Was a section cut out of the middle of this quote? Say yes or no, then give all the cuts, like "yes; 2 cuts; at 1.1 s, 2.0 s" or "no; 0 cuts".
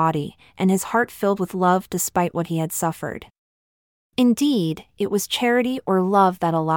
no; 0 cuts